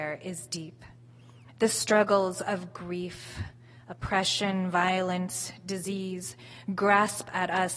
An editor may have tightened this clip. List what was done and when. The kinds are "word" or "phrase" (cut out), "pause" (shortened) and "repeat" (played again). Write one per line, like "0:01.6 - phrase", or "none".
none